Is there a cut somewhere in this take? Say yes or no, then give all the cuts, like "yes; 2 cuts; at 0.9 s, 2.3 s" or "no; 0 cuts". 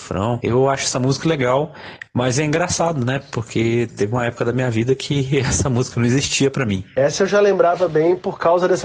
yes; 1 cut; at 1.2 s